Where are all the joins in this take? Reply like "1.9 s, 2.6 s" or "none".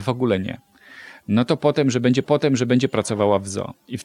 2.2 s

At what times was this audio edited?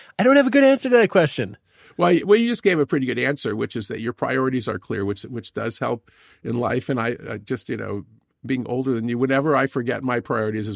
none

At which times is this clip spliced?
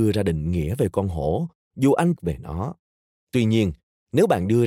2.2 s, 2.9 s

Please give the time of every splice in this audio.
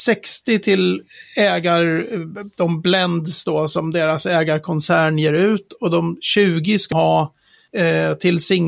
6.9 s

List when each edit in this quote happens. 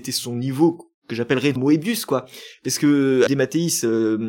1.0 s, 1.6 s, 3.3 s

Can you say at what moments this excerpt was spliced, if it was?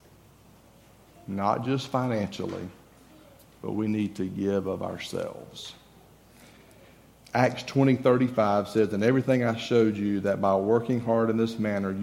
none

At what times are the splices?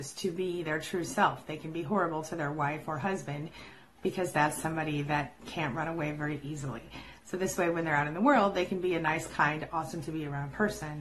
none

